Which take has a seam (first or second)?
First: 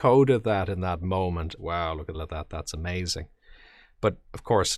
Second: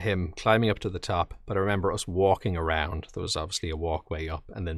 first